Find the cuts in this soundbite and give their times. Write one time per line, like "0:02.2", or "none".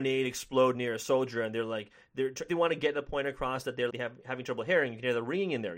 0:02.5
0:03.9